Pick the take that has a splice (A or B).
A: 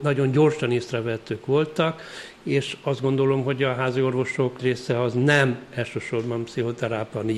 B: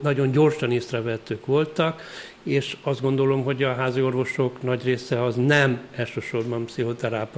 A